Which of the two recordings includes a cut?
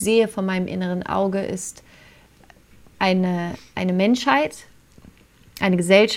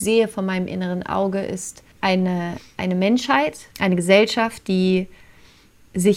second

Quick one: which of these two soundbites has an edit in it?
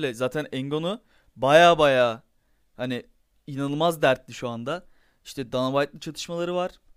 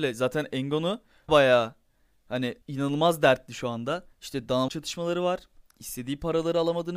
second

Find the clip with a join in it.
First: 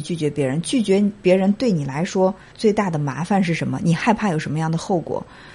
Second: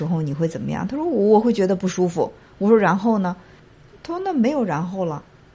first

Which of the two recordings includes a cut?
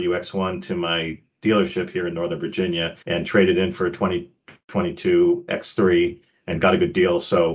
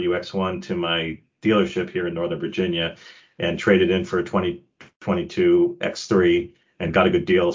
first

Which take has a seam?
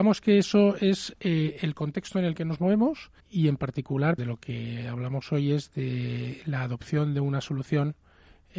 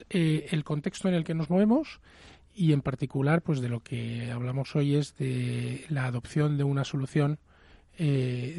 first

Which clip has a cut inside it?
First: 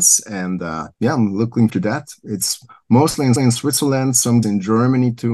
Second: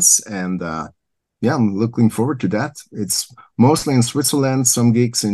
first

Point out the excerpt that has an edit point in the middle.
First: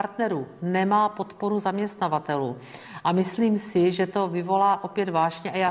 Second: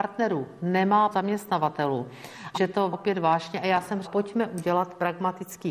second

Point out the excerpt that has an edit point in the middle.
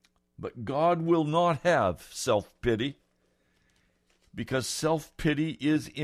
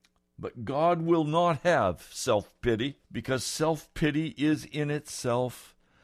second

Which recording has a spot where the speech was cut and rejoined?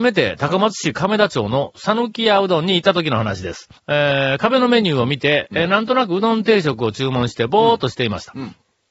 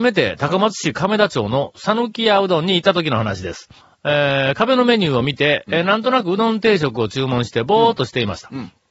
first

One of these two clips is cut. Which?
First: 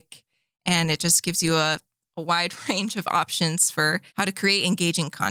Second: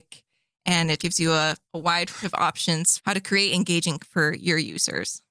second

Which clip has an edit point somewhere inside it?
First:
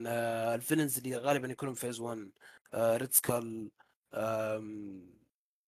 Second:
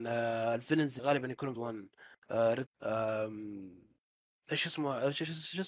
second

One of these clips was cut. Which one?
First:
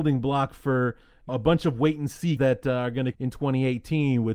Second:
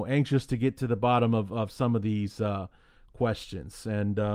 first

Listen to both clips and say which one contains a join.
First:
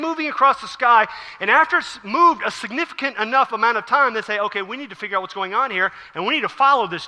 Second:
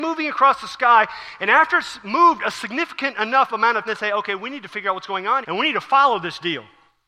second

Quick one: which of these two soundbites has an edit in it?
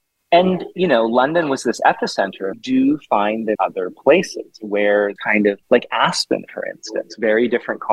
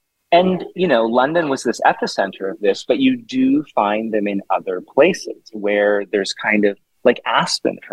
first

